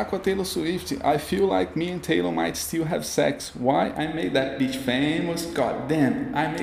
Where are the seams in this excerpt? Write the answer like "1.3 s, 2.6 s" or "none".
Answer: none